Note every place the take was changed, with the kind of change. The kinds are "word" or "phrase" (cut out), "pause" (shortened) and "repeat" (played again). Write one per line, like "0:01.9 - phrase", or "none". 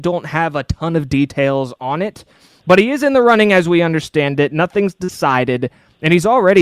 none